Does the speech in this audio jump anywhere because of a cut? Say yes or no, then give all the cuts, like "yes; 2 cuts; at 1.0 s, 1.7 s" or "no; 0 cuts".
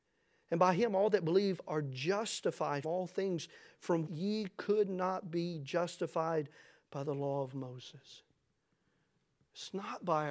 yes; 2 cuts; at 2.8 s, 4.1 s